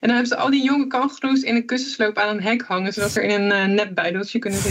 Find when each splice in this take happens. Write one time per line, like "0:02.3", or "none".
0:03.2